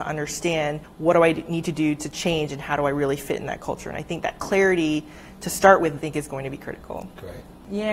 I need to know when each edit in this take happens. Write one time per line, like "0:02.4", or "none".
0:06.0